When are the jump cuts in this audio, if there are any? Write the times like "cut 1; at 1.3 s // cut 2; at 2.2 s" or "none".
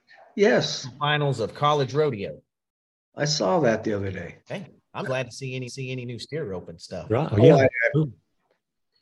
cut 1; at 4.4 s // cut 2; at 5.0 s // cut 3; at 5.7 s